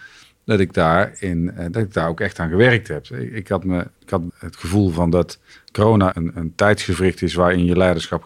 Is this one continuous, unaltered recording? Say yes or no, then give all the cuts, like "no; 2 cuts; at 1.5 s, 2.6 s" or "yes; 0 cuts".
no; 3 cuts; at 4.0 s, 4.3 s, 6.1 s